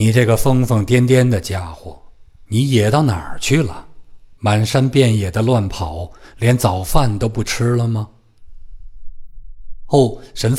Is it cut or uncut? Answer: cut